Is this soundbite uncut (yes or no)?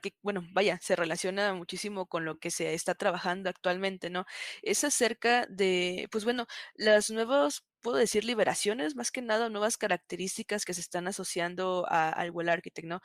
yes